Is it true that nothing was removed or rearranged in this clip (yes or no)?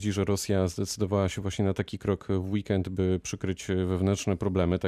yes